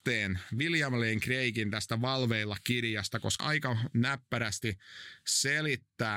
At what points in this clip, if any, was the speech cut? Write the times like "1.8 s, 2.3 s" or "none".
3.4 s